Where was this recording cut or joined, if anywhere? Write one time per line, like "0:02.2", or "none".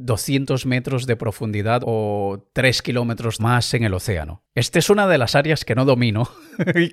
0:01.8
0:03.4